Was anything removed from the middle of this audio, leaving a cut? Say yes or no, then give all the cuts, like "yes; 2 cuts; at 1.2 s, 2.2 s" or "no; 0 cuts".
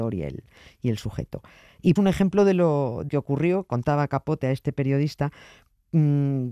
yes; 2 cuts; at 2.0 s, 3.1 s